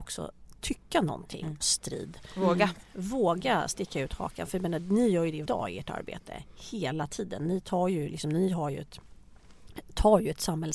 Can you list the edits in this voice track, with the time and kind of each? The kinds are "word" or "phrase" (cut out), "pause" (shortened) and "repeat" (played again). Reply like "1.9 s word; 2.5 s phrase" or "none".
1.6 s phrase; 5.5 s word